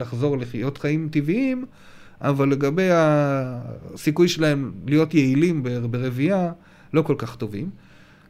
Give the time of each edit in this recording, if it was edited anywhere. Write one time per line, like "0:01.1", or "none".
none